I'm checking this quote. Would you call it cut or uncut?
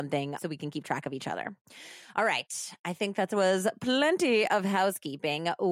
uncut